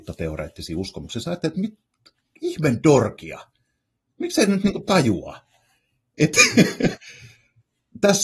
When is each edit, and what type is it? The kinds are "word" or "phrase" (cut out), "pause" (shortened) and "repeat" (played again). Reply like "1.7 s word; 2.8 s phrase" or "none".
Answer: none